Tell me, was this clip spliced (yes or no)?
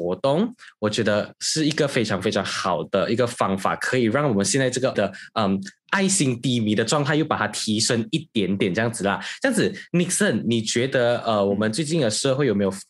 yes